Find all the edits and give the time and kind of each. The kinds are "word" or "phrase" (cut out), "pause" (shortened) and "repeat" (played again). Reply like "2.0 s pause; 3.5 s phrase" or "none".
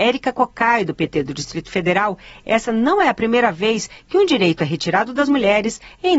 none